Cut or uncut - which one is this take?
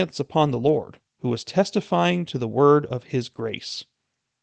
cut